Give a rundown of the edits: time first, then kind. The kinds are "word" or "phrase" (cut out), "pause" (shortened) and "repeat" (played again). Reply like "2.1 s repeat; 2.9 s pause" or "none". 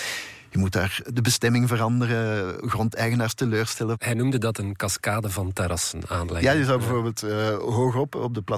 none